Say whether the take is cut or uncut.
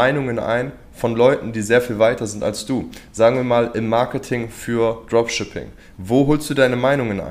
uncut